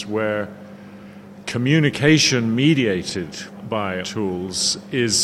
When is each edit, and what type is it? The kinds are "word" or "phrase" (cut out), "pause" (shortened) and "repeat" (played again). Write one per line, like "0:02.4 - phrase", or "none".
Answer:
0:03.6 - word
0:04.0 - word